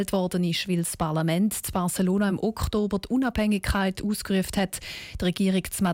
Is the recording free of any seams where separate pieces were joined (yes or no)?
yes